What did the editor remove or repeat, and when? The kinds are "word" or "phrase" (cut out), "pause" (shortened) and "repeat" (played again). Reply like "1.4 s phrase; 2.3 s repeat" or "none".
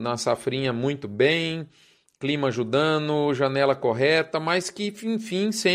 none